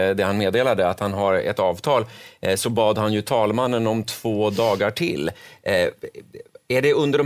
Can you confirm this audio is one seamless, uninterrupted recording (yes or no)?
yes